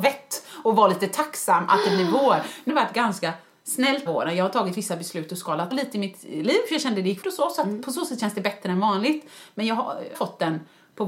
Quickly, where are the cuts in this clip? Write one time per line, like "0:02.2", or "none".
0:02.7
0:04.1
0:05.7
0:07.2
0:10.1